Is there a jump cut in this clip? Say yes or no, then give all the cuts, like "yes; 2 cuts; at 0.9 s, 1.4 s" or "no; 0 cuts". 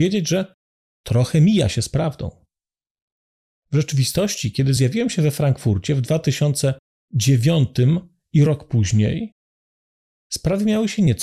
no; 0 cuts